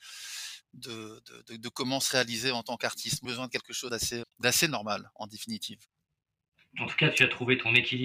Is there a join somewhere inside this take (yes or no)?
yes